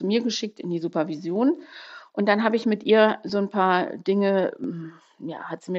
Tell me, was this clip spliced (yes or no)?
no